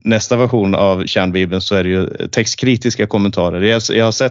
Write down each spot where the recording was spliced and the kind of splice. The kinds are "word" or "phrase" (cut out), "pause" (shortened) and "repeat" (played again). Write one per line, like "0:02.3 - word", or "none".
none